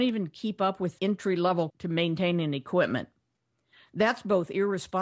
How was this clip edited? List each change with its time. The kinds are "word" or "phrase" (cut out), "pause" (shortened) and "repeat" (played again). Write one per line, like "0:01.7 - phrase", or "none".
0:01.0 - word
0:01.7 - word